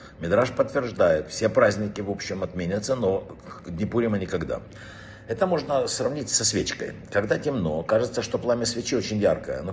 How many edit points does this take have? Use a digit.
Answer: 0